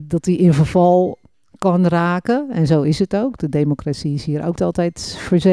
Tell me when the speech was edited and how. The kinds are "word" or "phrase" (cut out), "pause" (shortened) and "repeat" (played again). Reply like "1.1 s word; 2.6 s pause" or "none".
4.6 s word

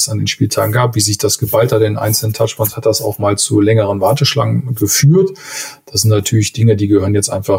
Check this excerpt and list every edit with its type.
none

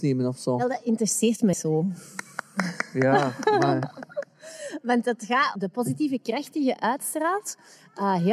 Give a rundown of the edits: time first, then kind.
1.5 s word; 5.6 s phrase

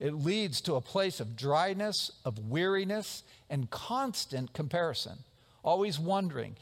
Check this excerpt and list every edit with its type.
none

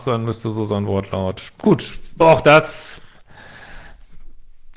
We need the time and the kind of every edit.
2.2 s word

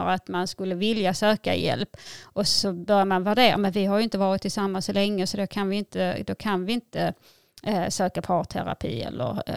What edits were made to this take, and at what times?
none

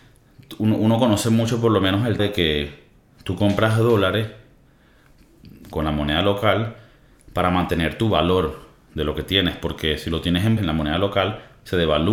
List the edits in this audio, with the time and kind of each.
2.2 s word; 5.7 s word; 10.6 s word

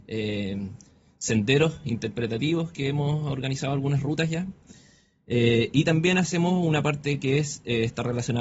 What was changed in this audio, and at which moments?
none

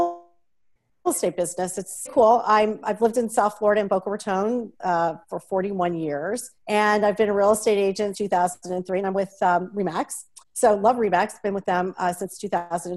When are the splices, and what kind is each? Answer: 2.1 s phrase; 6.6 s pause; 8.1 s word; 8.6 s pause

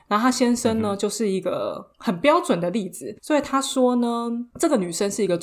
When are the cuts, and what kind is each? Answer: 3.2 s pause

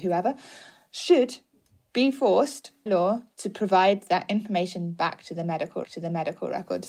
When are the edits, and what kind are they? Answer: 2.9 s word; 5.8 s repeat

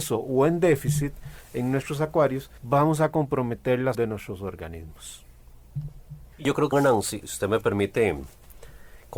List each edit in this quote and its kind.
2.6 s pause; 3.9 s word; 6.3 s pause; 6.7 s word

